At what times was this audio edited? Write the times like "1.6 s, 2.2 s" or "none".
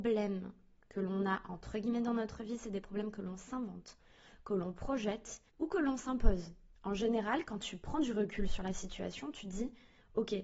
5.5 s, 6.8 s

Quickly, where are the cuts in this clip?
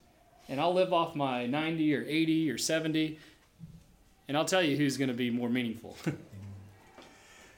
none

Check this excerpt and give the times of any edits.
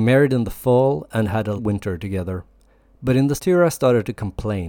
1.6 s, 3.4 s

